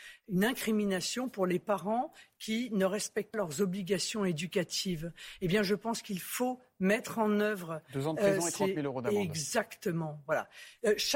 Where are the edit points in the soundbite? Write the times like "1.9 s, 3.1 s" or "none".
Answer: 3.3 s